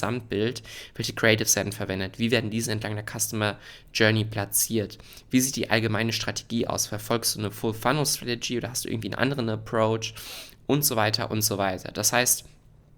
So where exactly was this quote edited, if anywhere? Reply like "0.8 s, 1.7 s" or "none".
none